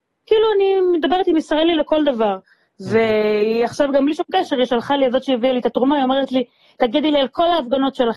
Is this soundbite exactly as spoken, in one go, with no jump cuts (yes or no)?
yes